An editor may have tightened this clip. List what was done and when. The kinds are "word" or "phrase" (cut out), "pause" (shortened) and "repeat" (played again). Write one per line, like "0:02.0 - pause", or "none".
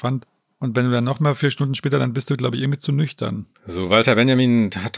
0:03.5 - pause